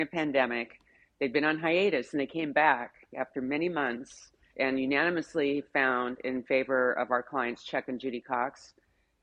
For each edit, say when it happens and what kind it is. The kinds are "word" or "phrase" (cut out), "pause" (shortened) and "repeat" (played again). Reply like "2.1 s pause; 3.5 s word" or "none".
4.5 s word